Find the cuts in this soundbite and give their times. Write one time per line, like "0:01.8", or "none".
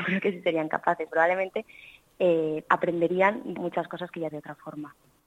0:01.1
0:02.6
0:03.6
0:04.3